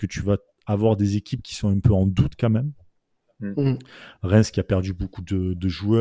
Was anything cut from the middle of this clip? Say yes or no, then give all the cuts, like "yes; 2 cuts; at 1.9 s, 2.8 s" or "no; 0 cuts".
no; 0 cuts